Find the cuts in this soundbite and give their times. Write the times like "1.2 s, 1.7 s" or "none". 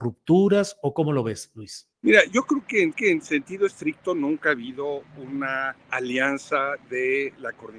1.9 s, 2.9 s, 5.8 s